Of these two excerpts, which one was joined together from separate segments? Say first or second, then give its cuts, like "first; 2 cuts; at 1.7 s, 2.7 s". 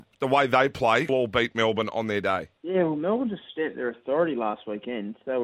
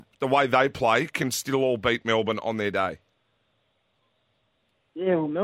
first; 2 cuts; at 1.1 s, 2.6 s